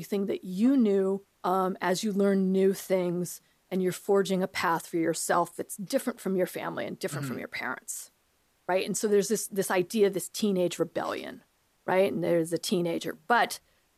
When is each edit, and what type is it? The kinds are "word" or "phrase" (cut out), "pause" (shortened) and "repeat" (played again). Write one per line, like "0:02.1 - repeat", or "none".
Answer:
0:01.3 - pause